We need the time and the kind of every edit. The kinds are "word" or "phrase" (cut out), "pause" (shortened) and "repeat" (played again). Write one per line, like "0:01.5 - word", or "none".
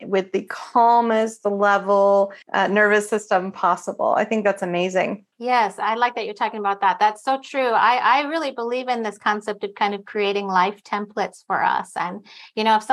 0:02.4 - pause
0:05.3 - pause